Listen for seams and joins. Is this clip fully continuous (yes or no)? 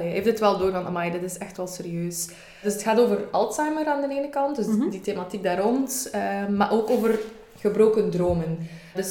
yes